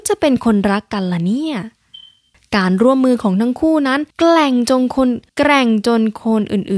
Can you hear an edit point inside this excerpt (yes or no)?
yes